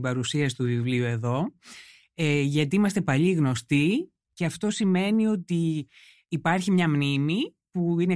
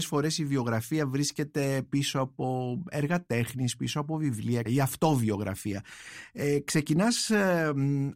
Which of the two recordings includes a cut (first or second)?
second